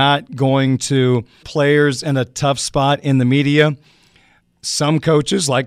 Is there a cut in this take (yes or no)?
yes